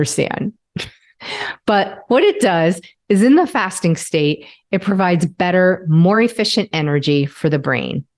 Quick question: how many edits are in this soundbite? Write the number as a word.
zero